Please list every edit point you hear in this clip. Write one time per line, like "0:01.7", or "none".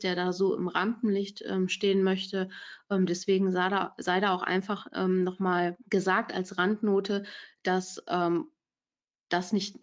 0:05.8